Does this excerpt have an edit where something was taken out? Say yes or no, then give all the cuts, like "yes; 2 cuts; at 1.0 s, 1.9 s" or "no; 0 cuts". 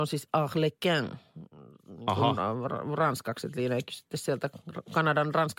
no; 0 cuts